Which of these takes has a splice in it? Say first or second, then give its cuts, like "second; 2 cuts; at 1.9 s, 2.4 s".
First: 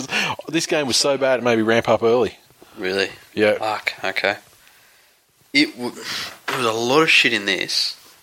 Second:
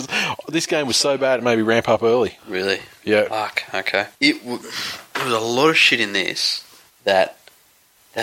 second; 3 cuts; at 2.4 s, 4.2 s, 6.9 s